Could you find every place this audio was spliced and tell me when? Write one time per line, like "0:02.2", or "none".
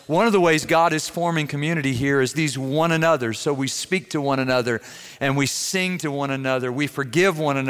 0:02.3